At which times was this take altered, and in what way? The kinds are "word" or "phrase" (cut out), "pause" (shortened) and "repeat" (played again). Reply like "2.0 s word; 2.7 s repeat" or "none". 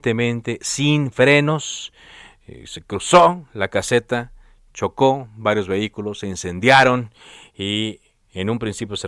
none